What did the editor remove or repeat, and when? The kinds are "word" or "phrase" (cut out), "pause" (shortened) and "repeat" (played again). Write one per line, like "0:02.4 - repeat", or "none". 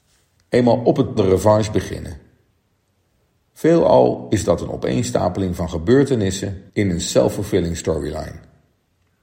0:01.2 - phrase
0:06.7 - pause

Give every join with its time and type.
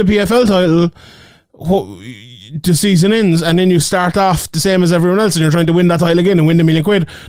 none

